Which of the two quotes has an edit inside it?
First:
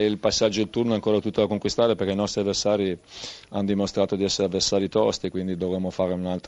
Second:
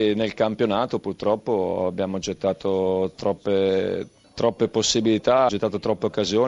second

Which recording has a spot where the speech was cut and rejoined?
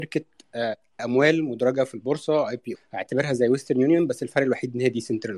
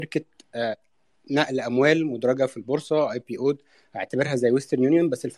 first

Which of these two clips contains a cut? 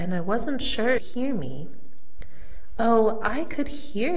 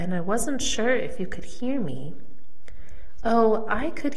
first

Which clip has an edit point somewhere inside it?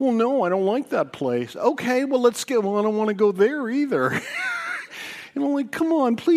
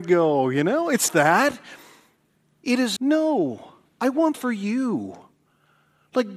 second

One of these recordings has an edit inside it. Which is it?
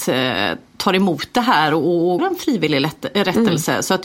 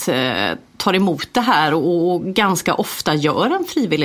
first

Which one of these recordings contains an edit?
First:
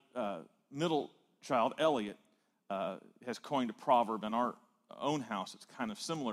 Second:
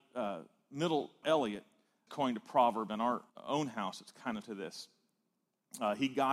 second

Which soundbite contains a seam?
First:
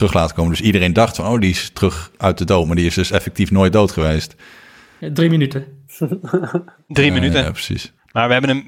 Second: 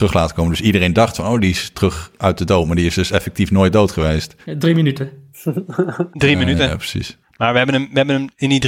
second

